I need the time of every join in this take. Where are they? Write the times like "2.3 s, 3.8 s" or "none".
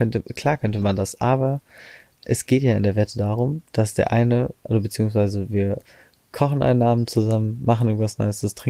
3.7 s